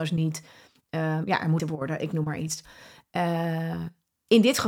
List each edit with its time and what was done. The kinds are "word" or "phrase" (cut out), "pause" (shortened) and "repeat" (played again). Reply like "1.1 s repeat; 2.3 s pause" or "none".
1.6 s word

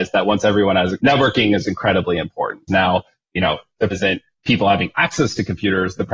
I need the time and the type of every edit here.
1.0 s word; 2.7 s word; 3.9 s word

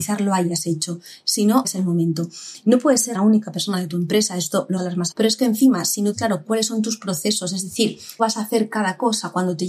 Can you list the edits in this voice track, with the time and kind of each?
1.6 s word; 3.1 s word; 4.8 s word; 5.1 s word; 6.1 s word; 8.2 s word

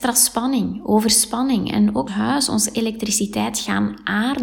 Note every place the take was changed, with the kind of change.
2.1 s phrase

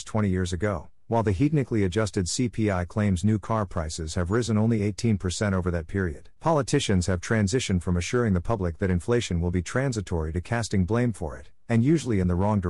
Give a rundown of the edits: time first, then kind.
6.4 s pause

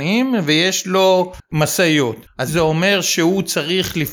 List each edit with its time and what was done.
2.5 s word

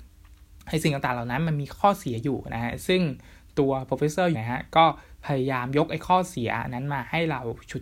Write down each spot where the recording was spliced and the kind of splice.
4.3 s word

